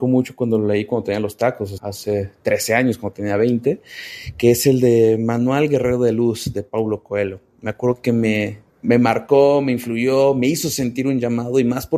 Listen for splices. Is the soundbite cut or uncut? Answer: cut